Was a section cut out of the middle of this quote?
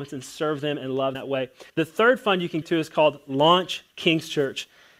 yes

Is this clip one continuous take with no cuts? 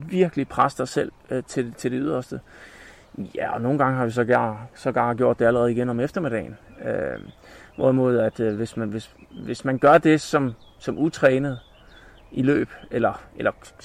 yes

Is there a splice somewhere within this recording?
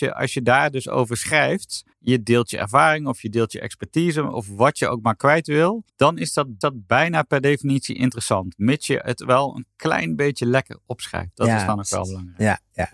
yes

